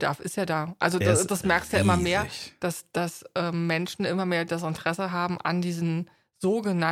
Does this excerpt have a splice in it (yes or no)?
no